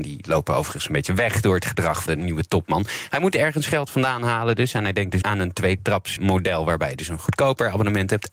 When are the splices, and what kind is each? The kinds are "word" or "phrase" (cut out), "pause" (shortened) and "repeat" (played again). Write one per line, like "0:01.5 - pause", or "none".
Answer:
0:02.1 - word
0:05.2 - word
0:06.2 - word